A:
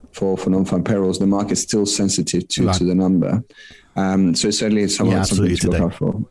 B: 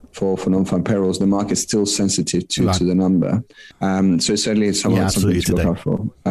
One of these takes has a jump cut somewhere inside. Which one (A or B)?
B